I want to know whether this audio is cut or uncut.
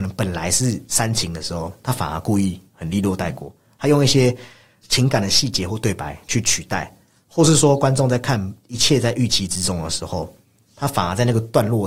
uncut